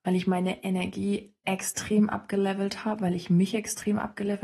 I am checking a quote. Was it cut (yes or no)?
no